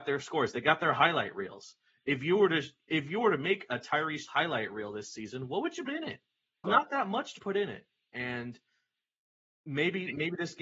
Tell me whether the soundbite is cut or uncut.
cut